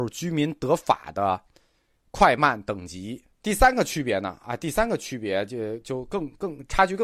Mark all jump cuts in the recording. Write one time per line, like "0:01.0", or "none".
0:03.3